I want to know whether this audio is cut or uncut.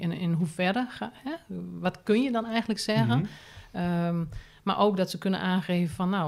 uncut